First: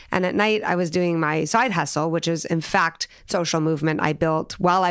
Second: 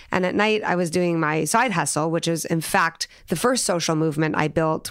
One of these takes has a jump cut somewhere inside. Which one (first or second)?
first